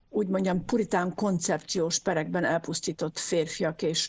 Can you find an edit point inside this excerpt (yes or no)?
no